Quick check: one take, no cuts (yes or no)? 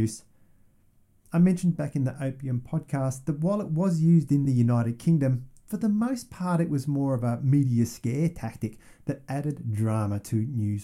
yes